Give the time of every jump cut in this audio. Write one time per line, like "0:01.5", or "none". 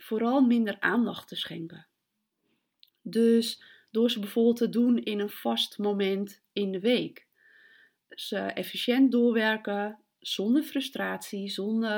none